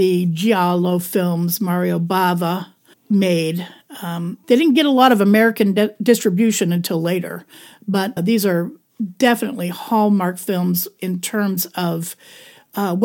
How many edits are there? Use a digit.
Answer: 3